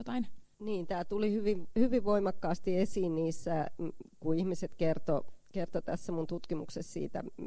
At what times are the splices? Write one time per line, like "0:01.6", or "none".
none